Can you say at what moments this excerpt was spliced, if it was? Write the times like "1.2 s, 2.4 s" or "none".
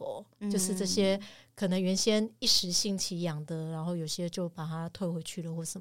none